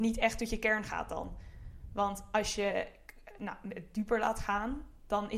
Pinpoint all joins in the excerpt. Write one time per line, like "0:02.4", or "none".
none